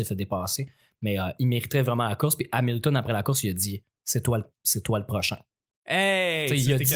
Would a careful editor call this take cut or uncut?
uncut